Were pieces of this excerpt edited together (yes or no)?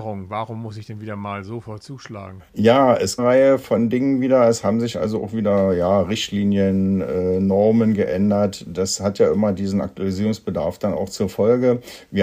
yes